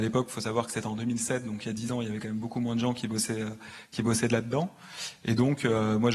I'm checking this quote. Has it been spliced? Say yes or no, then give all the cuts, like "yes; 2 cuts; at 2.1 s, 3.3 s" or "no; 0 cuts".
no; 0 cuts